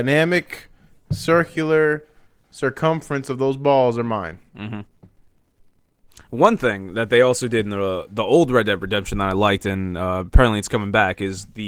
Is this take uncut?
yes; 0 cuts

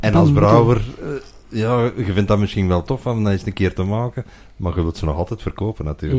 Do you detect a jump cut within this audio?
no; 0 cuts

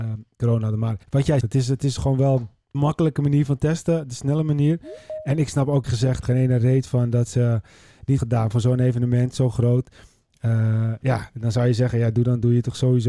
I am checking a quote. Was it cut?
yes; 6 cuts; at 1.0 s, 1.4 s, 2.7 s, 5.8 s, 6.2 s, 8.2 s

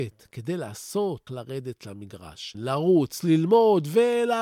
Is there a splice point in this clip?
yes; 2 cuts; at 1.3 s, 2.5 s

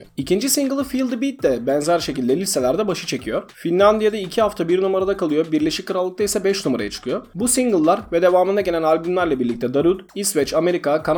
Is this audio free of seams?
yes; 0 cuts

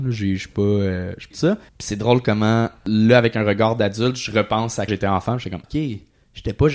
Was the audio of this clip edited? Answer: yes; 4 cuts; at 1.3 s, 1.7 s, 4.9 s, 5.6 s

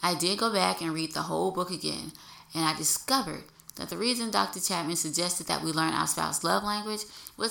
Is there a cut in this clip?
no; 0 cuts

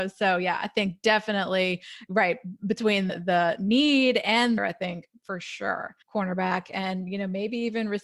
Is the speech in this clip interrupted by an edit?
yes; 3 cuts; at 3.1 s, 4.6 s, 6.0 s

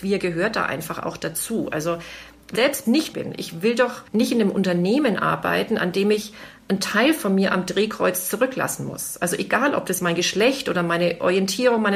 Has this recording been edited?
yes; 4 cuts; at 2.6 s, 3.1 s, 4.1 s, 10.0 s

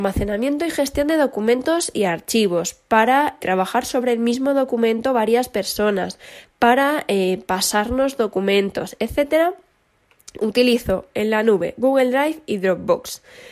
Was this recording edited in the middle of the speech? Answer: yes; 1 cut; at 3.4 s

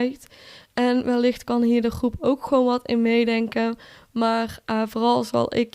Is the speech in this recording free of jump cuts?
yes; 0 cuts

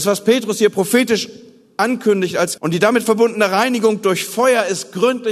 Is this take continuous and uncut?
no; 1 cut; at 2.6 s

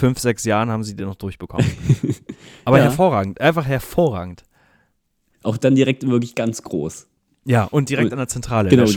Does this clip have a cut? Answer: no; 0 cuts

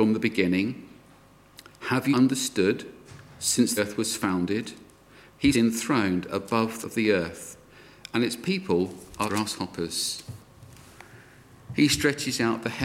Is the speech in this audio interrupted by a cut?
yes; 5 cuts; at 2.1 s, 3.8 s, 5.5 s, 6.8 s, 9.3 s

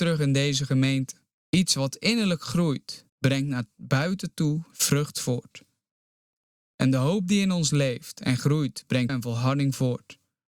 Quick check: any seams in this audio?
yes; 3 cuts; at 1.3 s, 3.1 s, 9.1 s

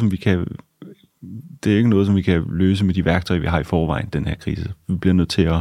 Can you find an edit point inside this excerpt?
no; 0 cuts

